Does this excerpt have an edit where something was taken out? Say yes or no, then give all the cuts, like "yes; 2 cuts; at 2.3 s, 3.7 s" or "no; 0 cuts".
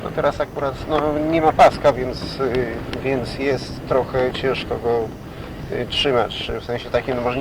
no; 0 cuts